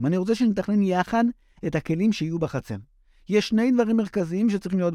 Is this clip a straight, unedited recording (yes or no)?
yes